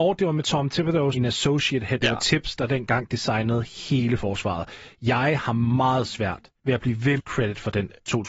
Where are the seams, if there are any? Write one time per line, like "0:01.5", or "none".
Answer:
0:01.1
0:02.0
0:06.6
0:07.2